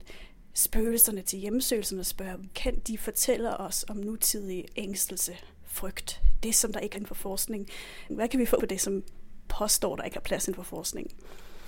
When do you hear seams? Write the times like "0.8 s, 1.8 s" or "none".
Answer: 2.5 s, 4.7 s, 6.9 s, 8.6 s, 9.5 s